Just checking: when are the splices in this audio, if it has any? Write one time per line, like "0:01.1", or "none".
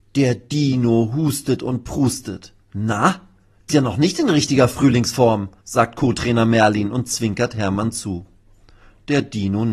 0:02.6
0:03.7
0:05.6

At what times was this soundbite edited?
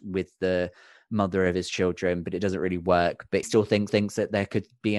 0:03.4
0:03.9

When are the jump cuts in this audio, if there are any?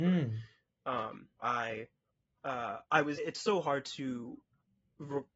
0:01.4
0:02.9
0:03.2

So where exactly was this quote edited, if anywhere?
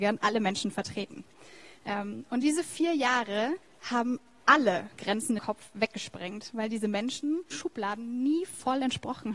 0:03.6
0:05.0
0:05.4
0:07.5

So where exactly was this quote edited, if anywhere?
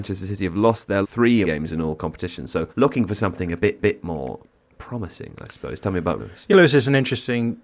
0:01.0
0:01.4
0:02.7
0:03.8
0:06.2
0:06.5

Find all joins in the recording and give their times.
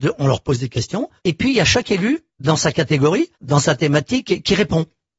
0:01.2
0:02.3
0:03.3

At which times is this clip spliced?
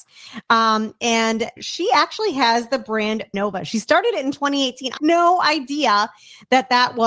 0:01.6
0:03.3
0:05.0

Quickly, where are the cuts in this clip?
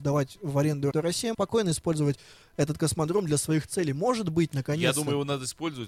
0:00.9
0:01.3

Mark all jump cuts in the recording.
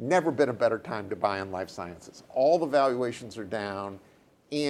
none

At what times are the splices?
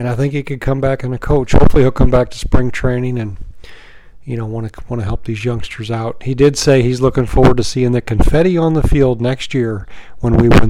none

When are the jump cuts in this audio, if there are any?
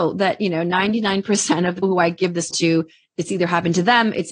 0:01.8
0:02.5

